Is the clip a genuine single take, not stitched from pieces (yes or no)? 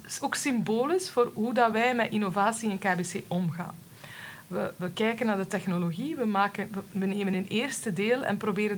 yes